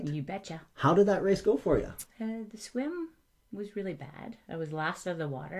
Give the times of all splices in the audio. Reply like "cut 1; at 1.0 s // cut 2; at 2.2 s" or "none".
none